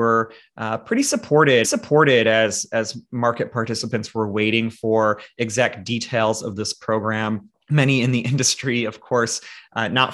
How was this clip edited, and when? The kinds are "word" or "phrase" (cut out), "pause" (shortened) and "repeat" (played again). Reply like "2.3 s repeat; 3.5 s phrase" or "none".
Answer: 1.6 s repeat; 7.5 s pause